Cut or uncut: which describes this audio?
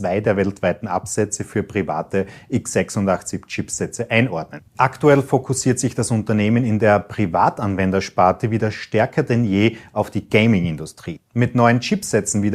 cut